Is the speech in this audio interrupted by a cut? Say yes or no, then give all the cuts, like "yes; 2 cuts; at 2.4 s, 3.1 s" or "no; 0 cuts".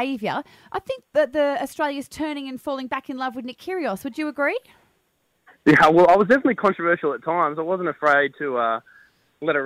no; 0 cuts